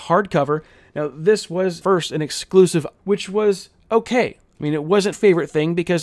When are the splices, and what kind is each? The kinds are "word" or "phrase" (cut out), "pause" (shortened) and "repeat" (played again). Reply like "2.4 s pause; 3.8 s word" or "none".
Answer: 1.8 s word; 3.0 s phrase; 5.1 s word